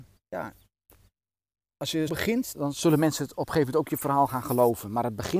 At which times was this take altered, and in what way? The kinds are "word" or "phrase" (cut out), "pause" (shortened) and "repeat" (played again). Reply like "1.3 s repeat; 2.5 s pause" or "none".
2.1 s word; 2.5 s word